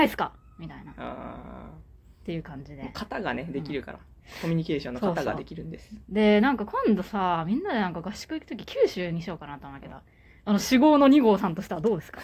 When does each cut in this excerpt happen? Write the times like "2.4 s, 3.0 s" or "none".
none